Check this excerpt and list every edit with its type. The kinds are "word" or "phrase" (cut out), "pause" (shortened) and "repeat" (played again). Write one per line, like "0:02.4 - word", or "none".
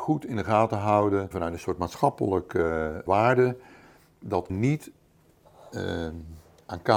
0:01.3 - word
0:03.1 - word
0:04.5 - word